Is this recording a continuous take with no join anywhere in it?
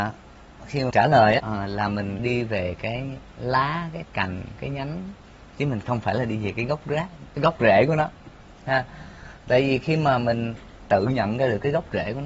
no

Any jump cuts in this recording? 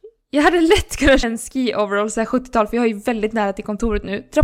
yes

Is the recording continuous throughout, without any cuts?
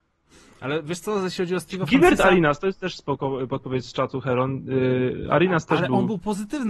yes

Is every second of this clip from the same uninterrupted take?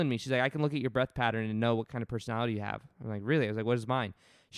yes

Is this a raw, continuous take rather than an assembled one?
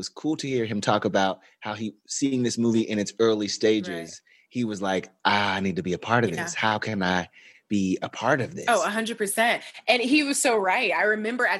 yes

